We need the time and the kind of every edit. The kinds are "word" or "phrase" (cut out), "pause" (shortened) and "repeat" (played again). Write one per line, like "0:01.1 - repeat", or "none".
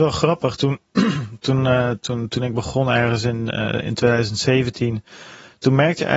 none